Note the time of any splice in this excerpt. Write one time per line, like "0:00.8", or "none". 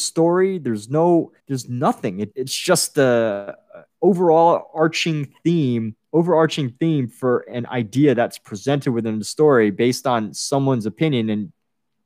0:01.4
0:02.3